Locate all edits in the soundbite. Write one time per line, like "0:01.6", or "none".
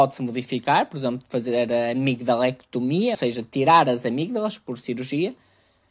0:03.1